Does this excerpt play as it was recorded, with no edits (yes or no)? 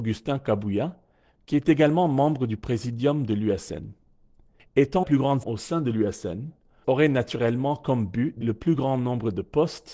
no